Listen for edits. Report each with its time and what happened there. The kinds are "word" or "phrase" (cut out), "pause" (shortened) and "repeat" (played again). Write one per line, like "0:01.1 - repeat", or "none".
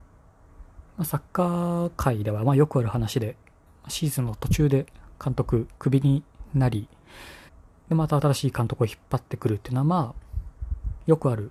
0:01.3 - pause
0:03.7 - pause
0:05.8 - pause
0:07.5 - pause